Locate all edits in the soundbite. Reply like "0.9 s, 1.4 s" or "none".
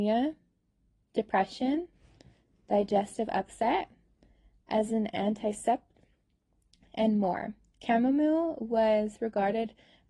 none